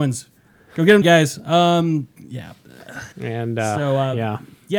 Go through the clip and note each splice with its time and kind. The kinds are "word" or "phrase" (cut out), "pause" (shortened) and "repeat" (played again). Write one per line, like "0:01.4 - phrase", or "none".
0:01.0 - word
0:03.1 - pause